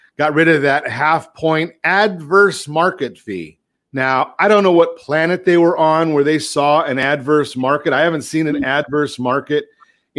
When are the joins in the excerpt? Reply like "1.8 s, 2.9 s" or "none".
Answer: 3.8 s

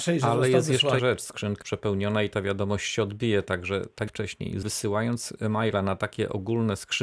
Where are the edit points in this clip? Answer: 1.0 s, 1.6 s, 4.1 s, 4.6 s

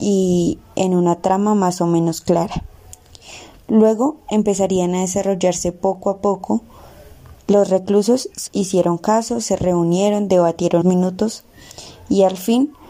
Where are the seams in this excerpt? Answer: 7.4 s, 8.5 s, 10.8 s

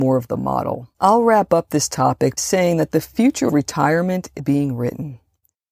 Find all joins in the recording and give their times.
0.9 s, 2.4 s, 3.5 s, 4.4 s

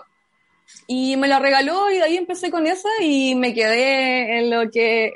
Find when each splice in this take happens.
none

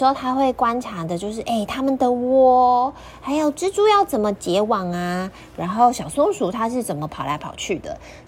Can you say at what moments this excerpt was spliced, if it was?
none

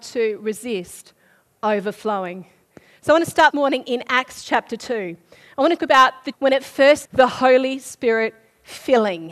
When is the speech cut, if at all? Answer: 3.5 s, 5.8 s, 6.3 s, 7.0 s

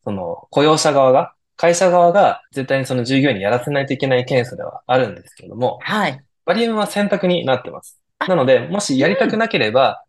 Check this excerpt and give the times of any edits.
2.5 s

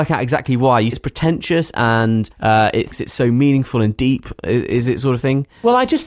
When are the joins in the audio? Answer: 0.9 s, 2.3 s, 2.9 s

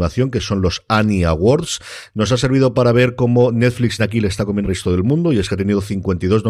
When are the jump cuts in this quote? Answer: 4.0 s, 4.6 s

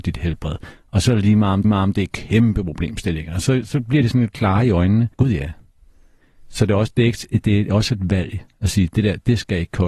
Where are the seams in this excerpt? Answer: 1.6 s, 5.1 s

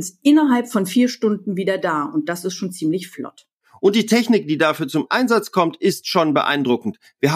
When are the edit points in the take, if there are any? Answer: none

